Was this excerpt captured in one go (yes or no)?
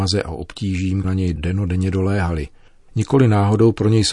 no